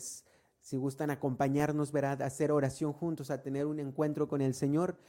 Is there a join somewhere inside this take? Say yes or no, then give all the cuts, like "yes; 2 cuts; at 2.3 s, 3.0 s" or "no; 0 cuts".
no; 0 cuts